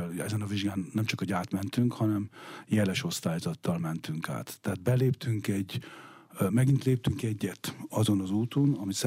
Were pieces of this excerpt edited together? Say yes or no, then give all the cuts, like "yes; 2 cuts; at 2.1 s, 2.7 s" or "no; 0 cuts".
no; 0 cuts